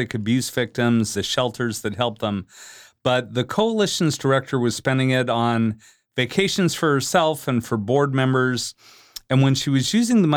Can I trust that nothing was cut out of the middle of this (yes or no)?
no